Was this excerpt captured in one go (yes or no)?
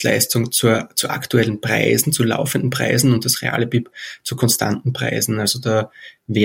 yes